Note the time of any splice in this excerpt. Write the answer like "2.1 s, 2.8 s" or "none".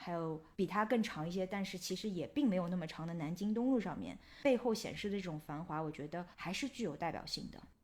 6.3 s